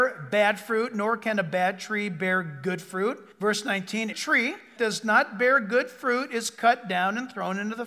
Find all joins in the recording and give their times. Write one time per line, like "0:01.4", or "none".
0:03.3
0:04.1
0:04.8